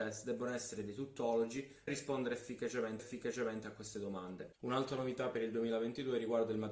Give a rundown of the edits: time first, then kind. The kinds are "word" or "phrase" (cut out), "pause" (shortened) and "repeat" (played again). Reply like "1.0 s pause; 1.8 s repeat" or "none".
1.9 s word; 3.0 s repeat; 4.6 s pause